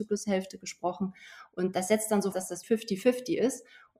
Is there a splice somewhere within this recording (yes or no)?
yes